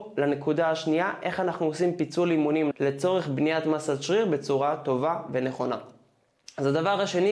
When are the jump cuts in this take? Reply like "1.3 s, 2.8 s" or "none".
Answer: 2.7 s